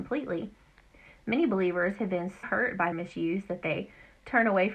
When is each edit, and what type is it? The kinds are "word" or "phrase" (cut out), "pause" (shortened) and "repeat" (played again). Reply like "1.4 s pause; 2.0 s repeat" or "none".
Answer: 2.4 s word; 2.9 s word

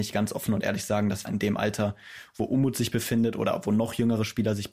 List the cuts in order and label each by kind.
1.3 s word

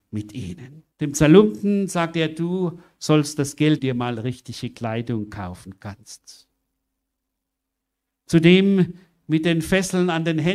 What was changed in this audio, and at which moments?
0.9 s pause; 3.8 s phrase

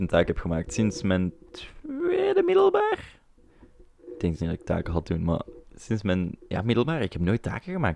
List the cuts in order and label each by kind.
4.4 s word; 5.6 s word; 6.4 s pause

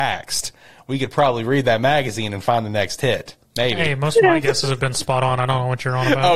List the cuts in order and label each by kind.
3.4 s pause

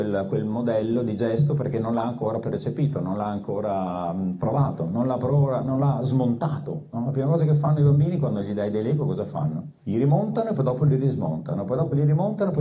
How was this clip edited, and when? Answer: 9.8 s pause

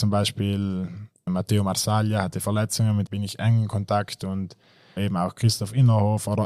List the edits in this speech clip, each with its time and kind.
1.3 s word; 2.4 s word; 3.1 s word; 5.0 s word

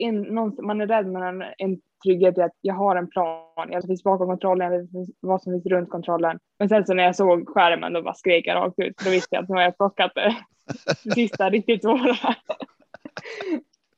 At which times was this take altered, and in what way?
2.5 s word; 3.8 s phrase; 6.5 s pause

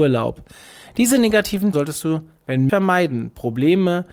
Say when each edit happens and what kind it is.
1.7 s word; 2.7 s word

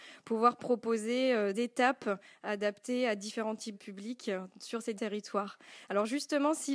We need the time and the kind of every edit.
1.5 s word; 3.7 s word; 5.0 s word

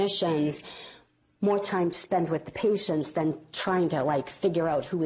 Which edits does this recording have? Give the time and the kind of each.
none

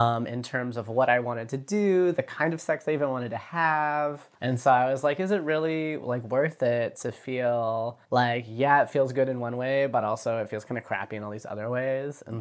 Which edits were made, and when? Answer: 4.3 s pause; 8.0 s pause

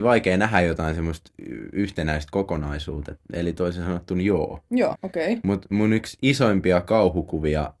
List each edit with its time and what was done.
5.0 s word

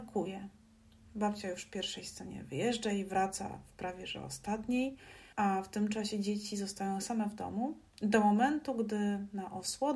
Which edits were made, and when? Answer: 5.3 s pause

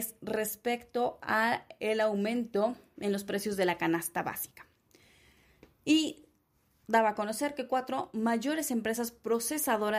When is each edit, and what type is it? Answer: none

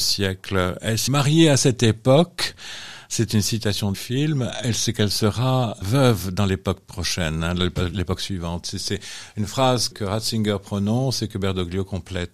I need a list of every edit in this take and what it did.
1.1 s phrase; 3.9 s word; 5.8 s word; 9.9 s word

